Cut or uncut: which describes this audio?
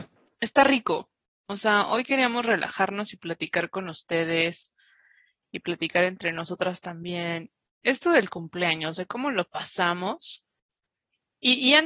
uncut